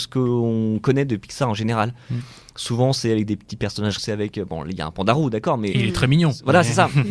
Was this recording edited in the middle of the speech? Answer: yes; 1 cut; at 4.0 s

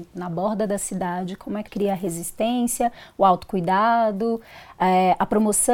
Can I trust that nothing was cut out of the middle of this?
no; 1 cut; at 1.7 s

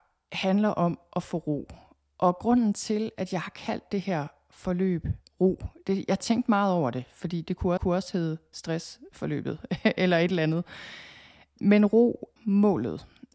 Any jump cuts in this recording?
yes; 2 cuts; at 7.8 s, 12.4 s

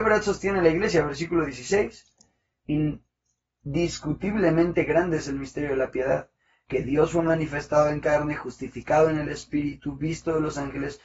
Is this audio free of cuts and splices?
yes; 0 cuts

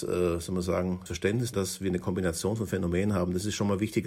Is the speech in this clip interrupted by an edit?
yes; 2 cuts; at 1.1 s, 1.5 s

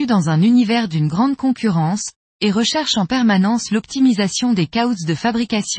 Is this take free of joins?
yes; 0 cuts

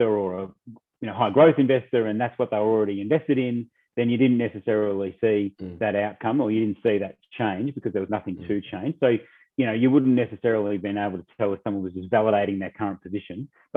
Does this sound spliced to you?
no; 0 cuts

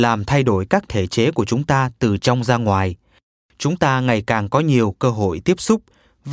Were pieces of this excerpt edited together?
no; 0 cuts

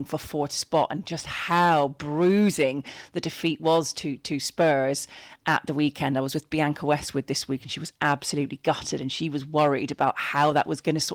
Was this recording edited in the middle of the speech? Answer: no; 0 cuts

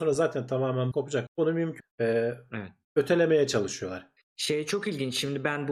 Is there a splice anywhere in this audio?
yes; 4 cuts; at 0.9 s, 1.3 s, 1.8 s, 4.2 s

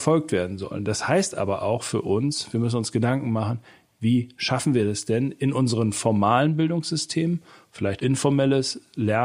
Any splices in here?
yes; 1 cut; at 8.0 s

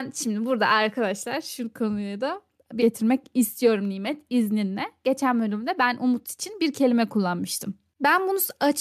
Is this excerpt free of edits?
no; 1 cut; at 2.8 s

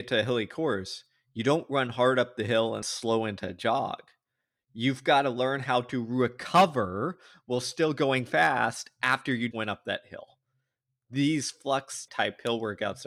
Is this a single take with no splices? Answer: no; 3 cuts; at 2.8 s, 9.5 s, 12.1 s

